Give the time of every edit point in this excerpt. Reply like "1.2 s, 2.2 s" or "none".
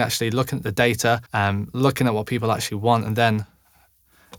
1.3 s